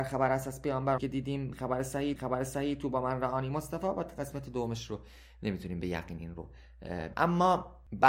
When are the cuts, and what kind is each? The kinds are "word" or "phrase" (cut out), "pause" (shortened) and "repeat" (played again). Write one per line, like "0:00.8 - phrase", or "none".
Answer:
0:01.0 - word
0:02.2 - repeat
0:07.1 - word